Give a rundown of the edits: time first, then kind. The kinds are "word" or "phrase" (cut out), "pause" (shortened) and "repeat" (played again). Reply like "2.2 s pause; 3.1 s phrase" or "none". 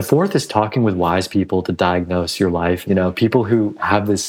2.9 s phrase